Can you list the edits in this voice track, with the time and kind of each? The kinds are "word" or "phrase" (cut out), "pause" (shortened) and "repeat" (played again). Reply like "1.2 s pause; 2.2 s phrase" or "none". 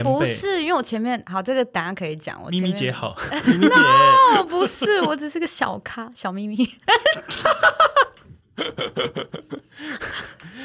none